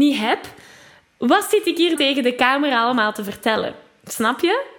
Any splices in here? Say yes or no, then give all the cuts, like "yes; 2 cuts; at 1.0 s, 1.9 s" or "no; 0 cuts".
yes; 1 cut; at 2.0 s